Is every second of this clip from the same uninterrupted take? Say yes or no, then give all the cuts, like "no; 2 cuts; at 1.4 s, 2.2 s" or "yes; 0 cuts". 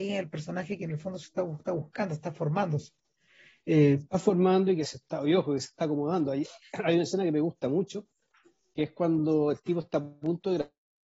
yes; 0 cuts